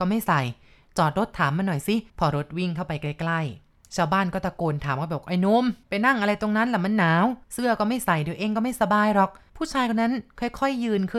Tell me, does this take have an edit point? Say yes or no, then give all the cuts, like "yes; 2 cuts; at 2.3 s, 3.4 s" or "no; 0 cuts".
yes; 4 cuts; at 2.1 s, 5.8 s, 7.4 s, 9.5 s